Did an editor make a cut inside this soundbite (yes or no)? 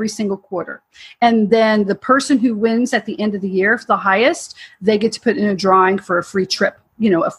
no